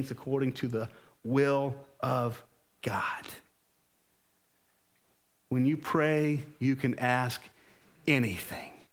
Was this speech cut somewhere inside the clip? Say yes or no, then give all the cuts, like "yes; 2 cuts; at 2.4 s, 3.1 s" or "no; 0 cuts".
no; 0 cuts